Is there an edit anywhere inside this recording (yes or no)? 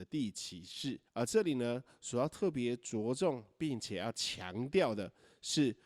yes